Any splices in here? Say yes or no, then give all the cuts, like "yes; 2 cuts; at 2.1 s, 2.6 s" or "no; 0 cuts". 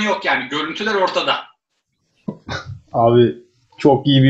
no; 0 cuts